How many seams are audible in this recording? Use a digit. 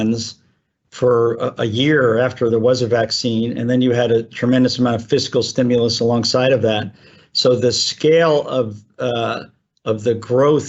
0